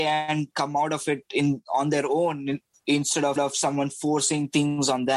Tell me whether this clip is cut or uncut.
cut